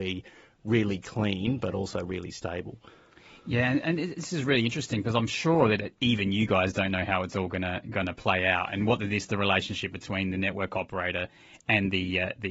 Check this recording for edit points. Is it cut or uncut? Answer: uncut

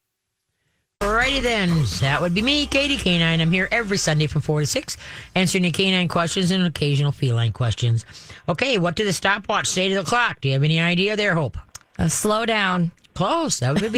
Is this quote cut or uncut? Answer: uncut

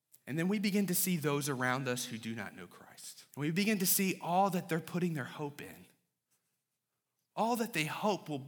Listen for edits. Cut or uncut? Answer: cut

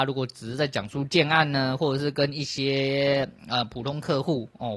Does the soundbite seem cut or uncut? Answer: uncut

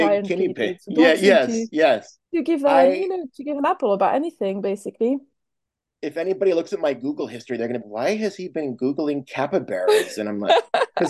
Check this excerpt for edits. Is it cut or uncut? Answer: cut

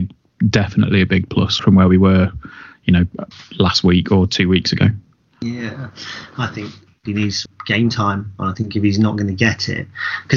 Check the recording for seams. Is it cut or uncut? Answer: cut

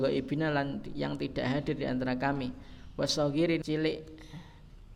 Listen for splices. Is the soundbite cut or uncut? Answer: cut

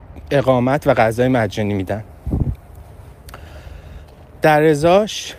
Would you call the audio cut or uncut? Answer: uncut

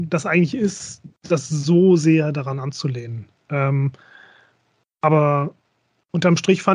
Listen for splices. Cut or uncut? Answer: uncut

